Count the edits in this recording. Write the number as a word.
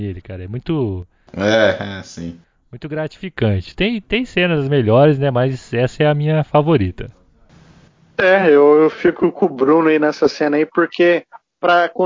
zero